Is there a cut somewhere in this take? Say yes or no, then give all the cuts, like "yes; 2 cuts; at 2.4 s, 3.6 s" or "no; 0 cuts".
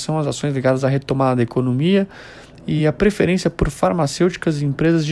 no; 0 cuts